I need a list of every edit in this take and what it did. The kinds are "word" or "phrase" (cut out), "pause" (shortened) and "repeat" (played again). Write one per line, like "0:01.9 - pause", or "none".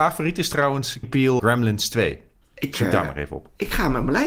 0:01.0 - word
0:01.4 - word
0:02.4 - pause